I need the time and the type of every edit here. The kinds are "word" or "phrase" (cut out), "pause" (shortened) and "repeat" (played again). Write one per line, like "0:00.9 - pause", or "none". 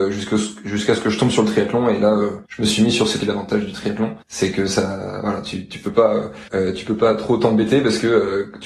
0:02.5 - pause
0:03.2 - phrase
0:04.2 - pause
0:06.5 - pause